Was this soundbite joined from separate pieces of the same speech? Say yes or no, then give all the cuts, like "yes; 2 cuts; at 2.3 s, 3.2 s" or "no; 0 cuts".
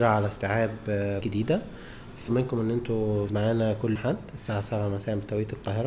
yes; 4 cuts; at 1.2 s, 2.3 s, 3.3 s, 3.9 s